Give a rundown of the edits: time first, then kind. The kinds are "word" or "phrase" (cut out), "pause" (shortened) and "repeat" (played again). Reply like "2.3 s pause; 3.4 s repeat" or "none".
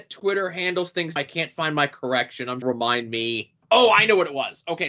1.2 s word; 2.6 s phrase; 3.6 s pause